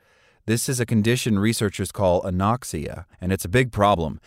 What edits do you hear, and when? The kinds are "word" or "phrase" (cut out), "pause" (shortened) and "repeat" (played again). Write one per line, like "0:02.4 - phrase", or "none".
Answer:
0:03.1 - pause

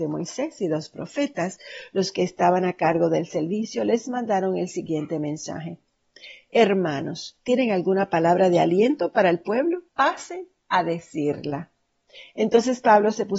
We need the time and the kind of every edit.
0:07.4 - pause
0:09.9 - pause

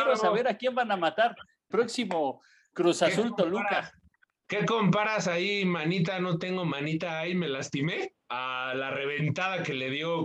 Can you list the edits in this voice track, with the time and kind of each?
0:01.7 - phrase
0:08.2 - pause

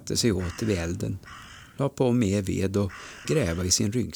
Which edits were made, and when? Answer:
0:03.2 - word

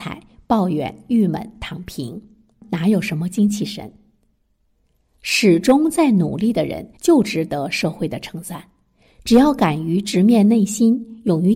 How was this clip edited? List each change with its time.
0:07.0 - pause

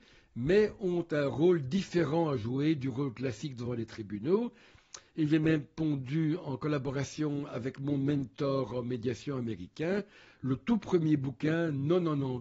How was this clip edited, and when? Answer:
none

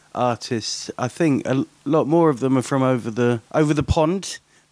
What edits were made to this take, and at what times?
0:03.5 - pause

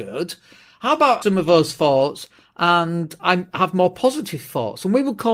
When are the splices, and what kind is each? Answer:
0:01.2 - phrase
0:03.2 - word

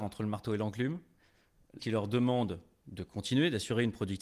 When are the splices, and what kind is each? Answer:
0:01.8 - word

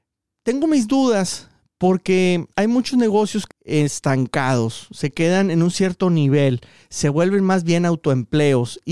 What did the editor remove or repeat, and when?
0:02.5 - pause
0:03.5 - phrase

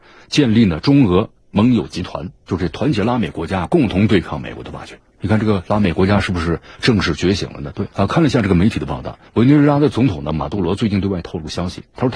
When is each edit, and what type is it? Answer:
0:02.4 - pause
0:05.1 - pause
0:07.9 - pause
0:09.3 - pause

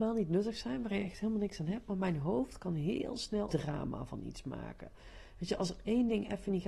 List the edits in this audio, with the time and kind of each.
0:03.5 - word

